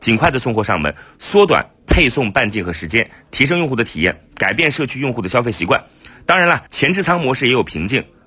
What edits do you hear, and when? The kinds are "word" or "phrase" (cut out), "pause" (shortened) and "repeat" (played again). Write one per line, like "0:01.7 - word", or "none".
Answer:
0:06.7 - pause